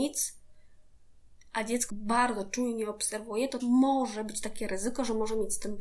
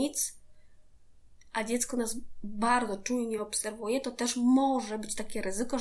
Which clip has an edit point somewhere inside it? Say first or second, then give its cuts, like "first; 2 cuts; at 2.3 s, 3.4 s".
first; 2 cuts; at 1.9 s, 3.6 s